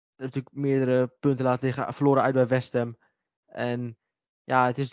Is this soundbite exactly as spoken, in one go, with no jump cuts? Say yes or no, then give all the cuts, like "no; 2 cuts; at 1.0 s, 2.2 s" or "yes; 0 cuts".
yes; 0 cuts